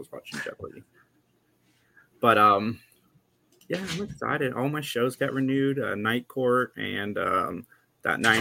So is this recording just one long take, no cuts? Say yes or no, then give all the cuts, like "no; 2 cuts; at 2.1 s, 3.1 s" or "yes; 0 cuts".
yes; 0 cuts